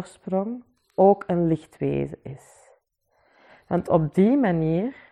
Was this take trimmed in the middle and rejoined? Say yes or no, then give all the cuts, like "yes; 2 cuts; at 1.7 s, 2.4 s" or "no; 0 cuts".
no; 0 cuts